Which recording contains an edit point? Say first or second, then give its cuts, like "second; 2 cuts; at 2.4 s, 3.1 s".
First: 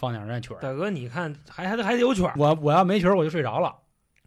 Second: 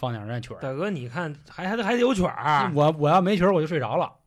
first; 1 cut; at 2.4 s